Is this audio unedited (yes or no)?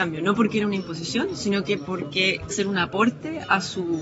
no